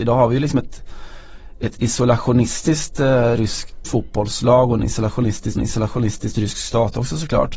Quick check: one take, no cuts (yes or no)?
no